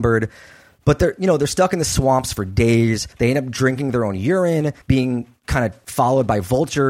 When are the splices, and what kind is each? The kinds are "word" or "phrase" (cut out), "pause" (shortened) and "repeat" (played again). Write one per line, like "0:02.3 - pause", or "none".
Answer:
0:03.1 - pause
0:04.8 - pause